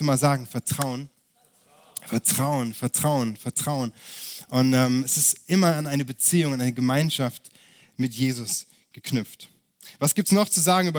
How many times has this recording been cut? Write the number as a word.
zero